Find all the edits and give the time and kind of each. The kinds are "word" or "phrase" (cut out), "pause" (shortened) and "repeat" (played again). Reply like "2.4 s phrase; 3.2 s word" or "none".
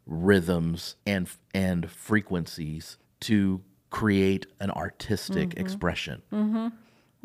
1.0 s pause; 3.0 s pause